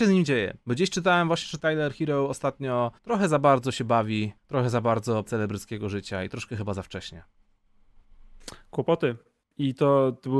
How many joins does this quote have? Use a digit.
4